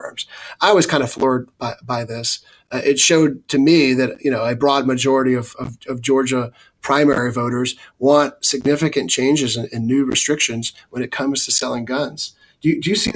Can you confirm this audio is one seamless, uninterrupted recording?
yes; 0 cuts

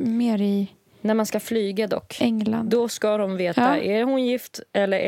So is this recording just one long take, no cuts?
yes; 0 cuts

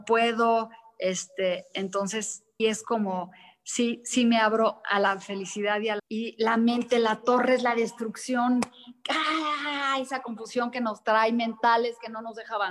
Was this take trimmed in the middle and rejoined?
yes; 2 cuts; at 2.6 s, 6.0 s

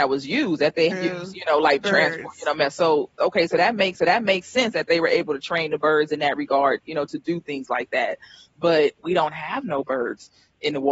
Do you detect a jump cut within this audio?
yes; 4 cuts; at 0.9 s, 1.8 s, 3.9 s, 9.0 s

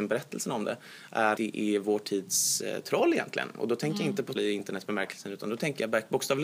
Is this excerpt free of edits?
no; 2 cuts; at 1.4 s, 4.4 s

